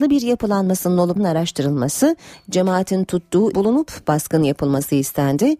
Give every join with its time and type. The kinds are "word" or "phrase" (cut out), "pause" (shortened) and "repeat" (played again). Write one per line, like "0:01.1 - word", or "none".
0:01.2 - word
0:03.5 - phrase